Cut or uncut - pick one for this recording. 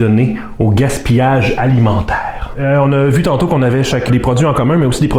cut